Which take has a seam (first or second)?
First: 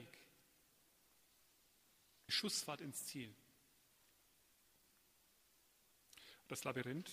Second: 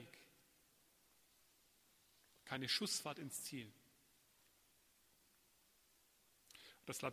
first